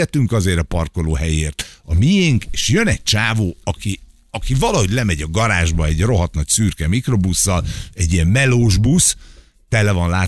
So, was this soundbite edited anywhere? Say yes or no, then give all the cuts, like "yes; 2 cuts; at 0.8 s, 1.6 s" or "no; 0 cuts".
no; 0 cuts